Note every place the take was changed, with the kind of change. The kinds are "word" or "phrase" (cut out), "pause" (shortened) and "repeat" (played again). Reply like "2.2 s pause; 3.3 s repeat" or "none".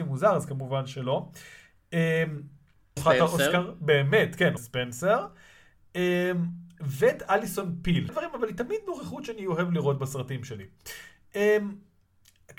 3.0 s word; 4.6 s word; 8.1 s phrase